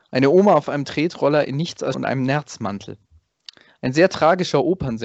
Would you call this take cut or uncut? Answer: cut